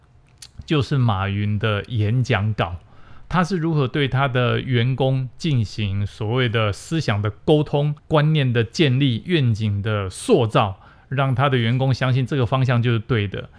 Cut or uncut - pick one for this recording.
cut